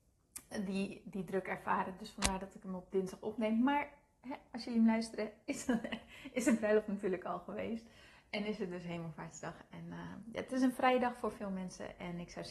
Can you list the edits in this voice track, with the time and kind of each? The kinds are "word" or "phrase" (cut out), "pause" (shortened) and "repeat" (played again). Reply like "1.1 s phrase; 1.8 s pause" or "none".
none